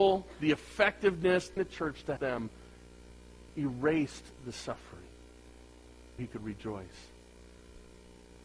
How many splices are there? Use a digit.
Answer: 4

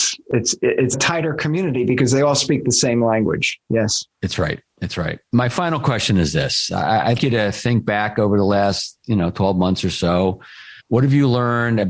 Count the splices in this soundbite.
4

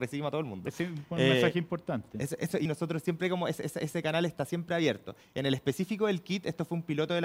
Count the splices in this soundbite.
1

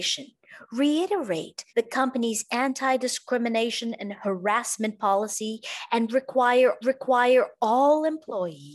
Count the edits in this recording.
2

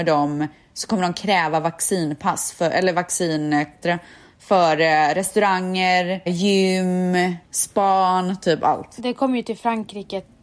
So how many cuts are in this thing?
3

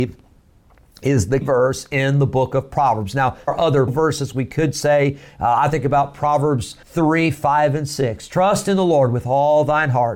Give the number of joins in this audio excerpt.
4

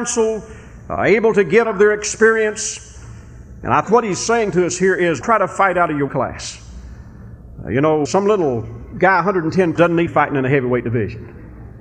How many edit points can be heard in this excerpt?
7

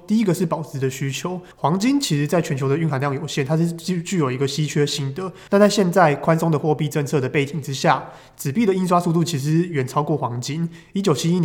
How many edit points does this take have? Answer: 2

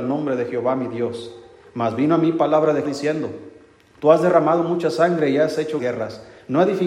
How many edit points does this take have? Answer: 2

